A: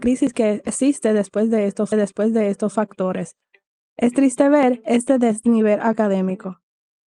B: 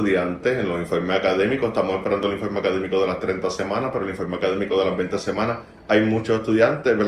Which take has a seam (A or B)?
A